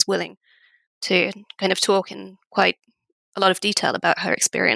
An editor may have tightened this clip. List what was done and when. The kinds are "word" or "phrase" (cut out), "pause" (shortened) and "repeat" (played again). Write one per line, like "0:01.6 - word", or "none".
none